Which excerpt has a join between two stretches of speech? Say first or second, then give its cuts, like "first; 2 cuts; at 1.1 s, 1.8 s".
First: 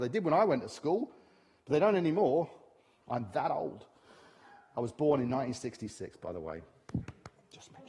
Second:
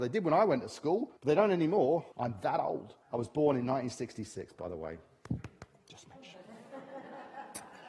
second; 3 cuts; at 1.2 s, 2.1 s, 3.0 s